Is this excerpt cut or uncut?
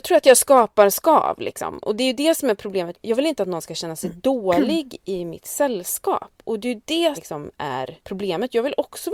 cut